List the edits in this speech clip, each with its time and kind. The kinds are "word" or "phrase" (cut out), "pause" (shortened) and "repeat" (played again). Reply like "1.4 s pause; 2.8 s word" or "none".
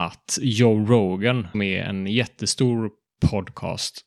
1.5 s word